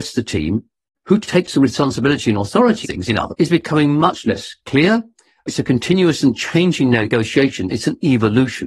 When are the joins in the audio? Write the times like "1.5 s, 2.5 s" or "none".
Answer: 2.8 s, 3.3 s

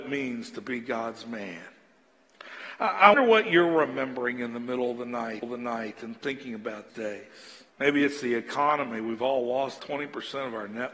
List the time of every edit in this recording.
3.1 s, 5.4 s, 6.9 s, 7.7 s, 9.8 s

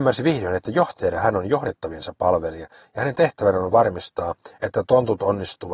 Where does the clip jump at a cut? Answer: none

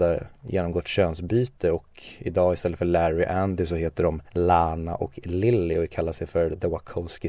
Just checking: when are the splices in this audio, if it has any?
4.3 s

